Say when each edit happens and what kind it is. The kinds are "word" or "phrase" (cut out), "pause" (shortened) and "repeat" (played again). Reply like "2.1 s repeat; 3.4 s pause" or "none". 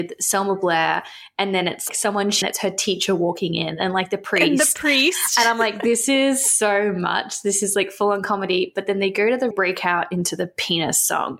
1.9 s word; 2.4 s phrase; 9.5 s phrase